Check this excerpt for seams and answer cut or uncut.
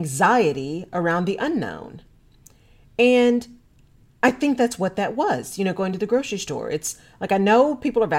uncut